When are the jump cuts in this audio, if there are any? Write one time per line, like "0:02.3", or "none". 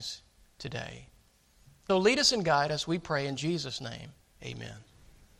0:01.9
0:04.2